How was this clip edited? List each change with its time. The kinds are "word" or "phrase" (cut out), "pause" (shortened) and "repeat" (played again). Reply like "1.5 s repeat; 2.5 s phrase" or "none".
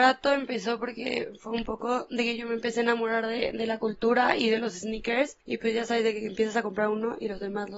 5.4 s pause